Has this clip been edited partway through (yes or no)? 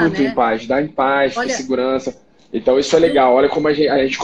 no